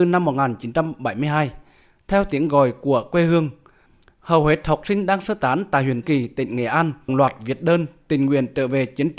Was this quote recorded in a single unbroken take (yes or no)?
no